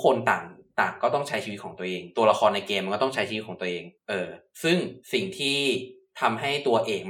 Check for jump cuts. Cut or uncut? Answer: cut